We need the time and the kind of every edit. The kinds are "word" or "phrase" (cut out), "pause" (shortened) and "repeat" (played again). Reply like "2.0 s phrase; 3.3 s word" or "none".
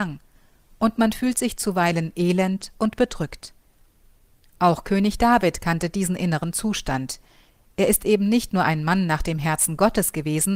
none